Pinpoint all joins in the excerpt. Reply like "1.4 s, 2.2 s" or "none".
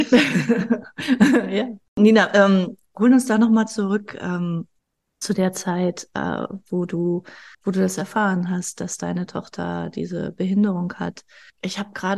4.8 s, 7.5 s